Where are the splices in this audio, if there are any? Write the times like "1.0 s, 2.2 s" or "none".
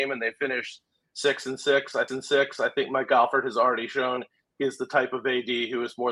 2.1 s